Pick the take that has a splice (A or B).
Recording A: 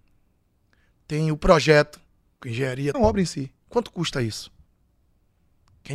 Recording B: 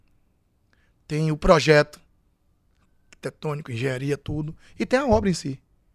A